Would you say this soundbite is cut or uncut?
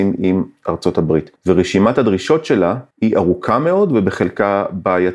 cut